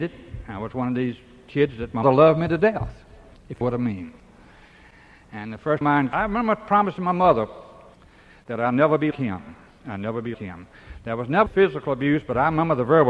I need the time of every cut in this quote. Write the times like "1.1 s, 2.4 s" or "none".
2.0 s, 3.6 s, 5.8 s, 6.1 s, 9.1 s, 10.3 s, 11.5 s

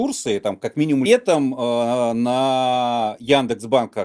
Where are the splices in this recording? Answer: 1.1 s

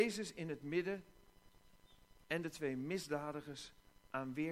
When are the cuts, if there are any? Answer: none

